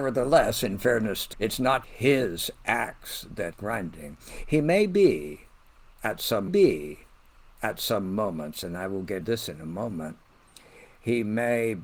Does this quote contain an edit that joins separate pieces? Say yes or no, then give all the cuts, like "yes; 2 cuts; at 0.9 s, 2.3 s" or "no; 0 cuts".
yes; 5 cuts; at 1.3 s, 1.8 s, 3.5 s, 6.5 s, 9.2 s